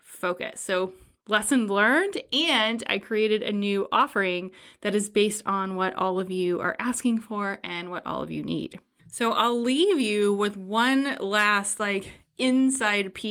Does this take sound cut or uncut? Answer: uncut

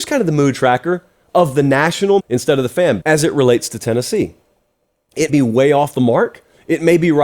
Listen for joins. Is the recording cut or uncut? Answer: cut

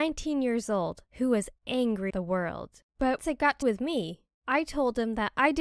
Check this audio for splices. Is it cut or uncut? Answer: cut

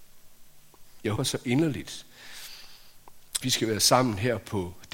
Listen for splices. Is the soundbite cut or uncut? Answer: cut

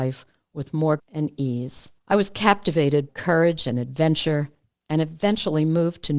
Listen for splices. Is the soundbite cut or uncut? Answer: cut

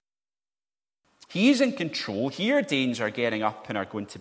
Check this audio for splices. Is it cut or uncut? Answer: uncut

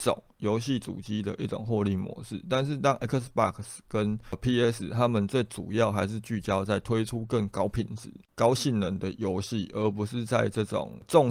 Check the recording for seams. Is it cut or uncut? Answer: uncut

